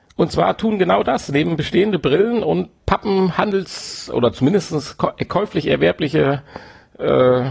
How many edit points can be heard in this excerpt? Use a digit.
0